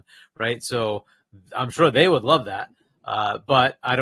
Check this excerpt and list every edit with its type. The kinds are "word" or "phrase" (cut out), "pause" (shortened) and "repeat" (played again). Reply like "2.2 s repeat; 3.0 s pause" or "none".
none